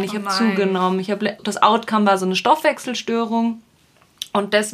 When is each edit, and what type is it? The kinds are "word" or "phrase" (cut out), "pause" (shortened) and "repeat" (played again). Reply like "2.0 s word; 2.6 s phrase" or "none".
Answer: 1.4 s word